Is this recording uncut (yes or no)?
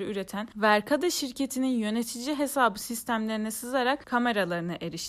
yes